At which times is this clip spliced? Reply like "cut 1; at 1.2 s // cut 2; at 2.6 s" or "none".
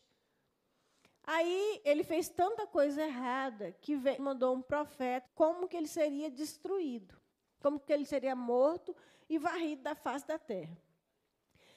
cut 1; at 4.2 s // cut 2; at 5.3 s